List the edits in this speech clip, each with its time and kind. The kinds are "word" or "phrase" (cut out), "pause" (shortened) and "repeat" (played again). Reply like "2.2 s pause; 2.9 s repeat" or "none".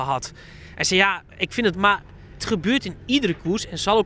1.3 s pause; 1.7 s word; 2.4 s word

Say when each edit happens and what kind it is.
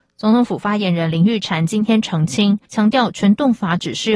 2.7 s pause

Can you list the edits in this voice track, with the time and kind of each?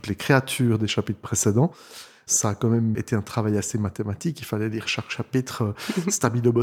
2.9 s word

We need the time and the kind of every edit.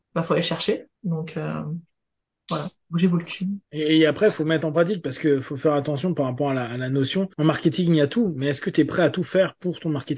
1.0 s pause; 3.6 s pause; 7.3 s pause

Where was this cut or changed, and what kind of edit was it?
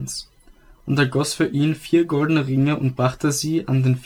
none

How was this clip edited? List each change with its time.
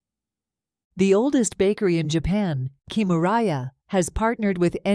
none

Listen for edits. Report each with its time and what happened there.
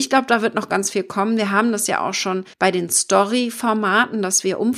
2.5 s pause

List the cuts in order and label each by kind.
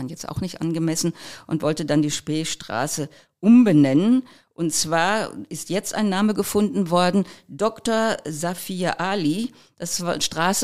none

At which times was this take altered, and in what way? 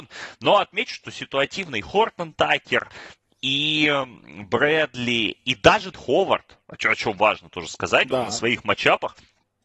5.9 s word

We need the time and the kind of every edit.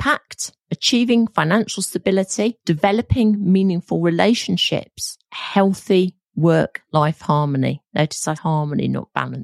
2.6 s pause; 8.3 s word

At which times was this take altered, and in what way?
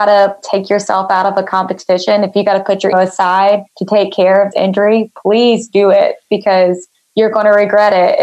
2.9 s word; 3.7 s pause; 4.5 s word

